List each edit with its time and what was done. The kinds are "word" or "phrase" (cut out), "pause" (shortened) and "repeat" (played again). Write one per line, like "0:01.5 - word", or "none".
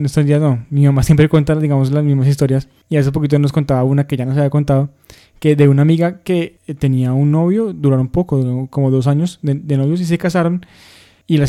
none